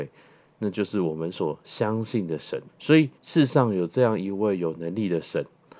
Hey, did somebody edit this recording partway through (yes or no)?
yes